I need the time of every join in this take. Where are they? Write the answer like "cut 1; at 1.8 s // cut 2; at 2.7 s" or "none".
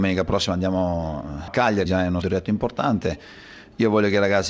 cut 1; at 1.5 s // cut 2; at 1.9 s // cut 3; at 2.2 s